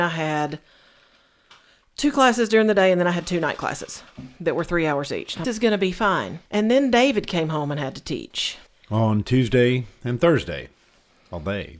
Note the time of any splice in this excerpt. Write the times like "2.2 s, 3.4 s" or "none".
5.4 s, 6.5 s, 8.7 s